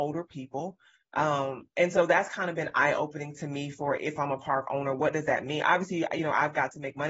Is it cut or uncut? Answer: uncut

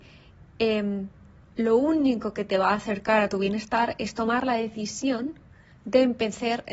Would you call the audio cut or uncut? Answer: uncut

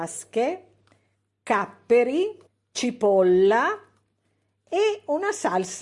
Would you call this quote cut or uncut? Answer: cut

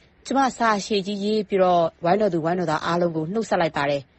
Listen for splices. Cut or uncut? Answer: uncut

